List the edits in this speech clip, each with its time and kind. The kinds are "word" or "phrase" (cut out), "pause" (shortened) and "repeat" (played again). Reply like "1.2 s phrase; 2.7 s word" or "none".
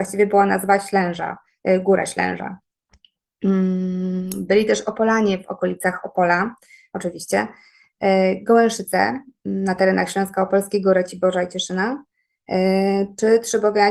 none